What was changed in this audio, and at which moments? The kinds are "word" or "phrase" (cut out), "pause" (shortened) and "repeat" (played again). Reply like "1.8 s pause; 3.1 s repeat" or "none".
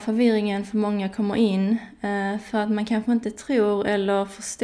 none